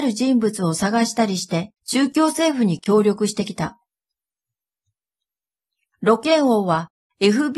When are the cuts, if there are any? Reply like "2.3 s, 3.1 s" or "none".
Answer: 1.8 s